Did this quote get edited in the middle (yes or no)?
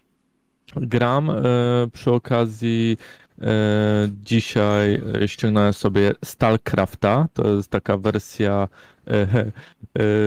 no